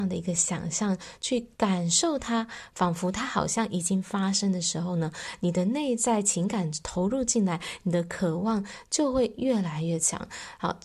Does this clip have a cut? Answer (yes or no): yes